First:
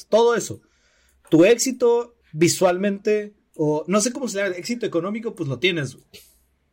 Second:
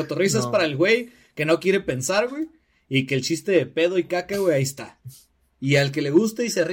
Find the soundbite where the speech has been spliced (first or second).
first